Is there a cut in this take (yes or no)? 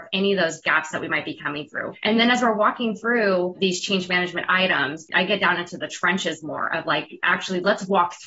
no